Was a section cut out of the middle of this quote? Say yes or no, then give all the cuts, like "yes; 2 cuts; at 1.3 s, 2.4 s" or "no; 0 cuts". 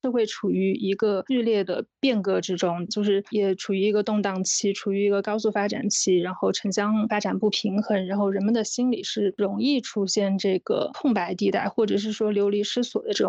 yes; 1 cut; at 2.9 s